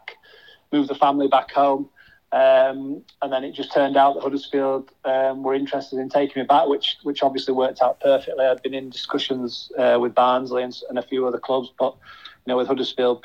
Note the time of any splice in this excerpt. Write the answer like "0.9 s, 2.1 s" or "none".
3.1 s